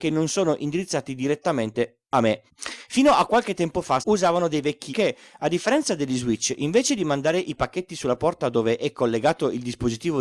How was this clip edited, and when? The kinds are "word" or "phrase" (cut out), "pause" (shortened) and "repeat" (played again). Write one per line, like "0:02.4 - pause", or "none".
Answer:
0:02.1 - pause
0:02.5 - pause
0:04.0 - word
0:04.9 - word